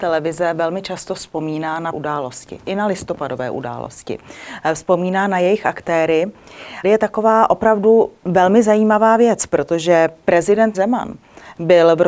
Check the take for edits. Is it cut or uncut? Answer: cut